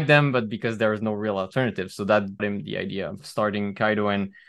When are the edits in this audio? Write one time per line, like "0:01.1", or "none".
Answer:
0:02.4